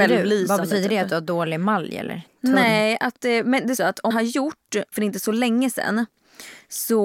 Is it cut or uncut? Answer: cut